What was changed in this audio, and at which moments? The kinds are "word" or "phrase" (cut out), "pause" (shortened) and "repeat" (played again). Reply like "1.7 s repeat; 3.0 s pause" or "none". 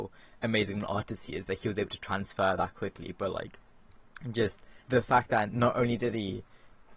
4.8 s pause